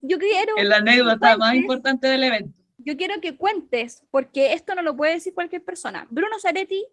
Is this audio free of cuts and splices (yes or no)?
yes